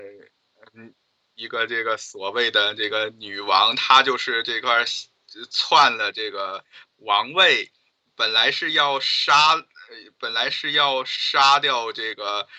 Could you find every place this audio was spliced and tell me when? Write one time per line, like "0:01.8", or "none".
none